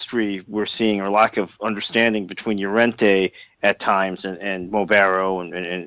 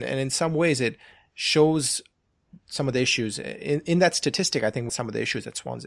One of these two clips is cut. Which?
second; 1 cut; at 4.9 s

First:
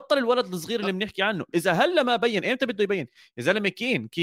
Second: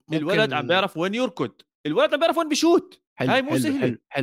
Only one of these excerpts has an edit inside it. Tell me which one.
second; 1 cut; at 3.1 s

